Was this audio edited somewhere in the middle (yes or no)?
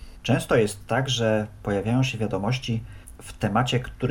no